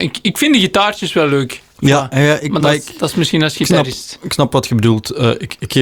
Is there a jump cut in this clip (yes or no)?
no